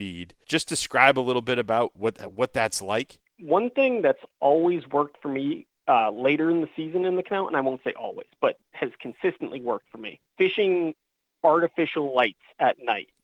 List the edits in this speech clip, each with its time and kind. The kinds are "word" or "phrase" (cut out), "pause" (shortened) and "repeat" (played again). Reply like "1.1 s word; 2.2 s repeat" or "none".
none

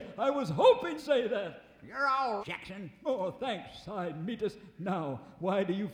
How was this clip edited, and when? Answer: 1.0 s word; 2.4 s word

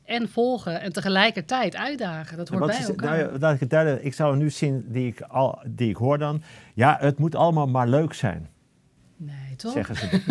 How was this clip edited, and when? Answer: none

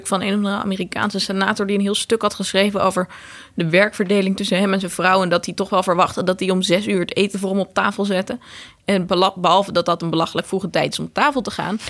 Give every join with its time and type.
none

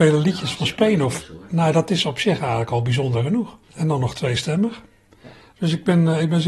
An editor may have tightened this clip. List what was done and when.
3.6 s pause

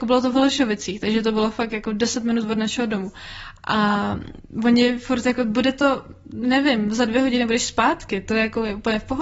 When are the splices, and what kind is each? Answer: none

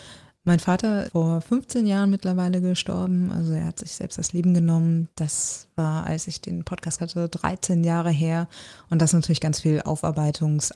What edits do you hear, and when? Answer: 1.1 s word; 7.0 s word

